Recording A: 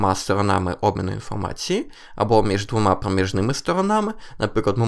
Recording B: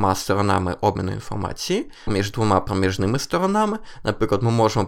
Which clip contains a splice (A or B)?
B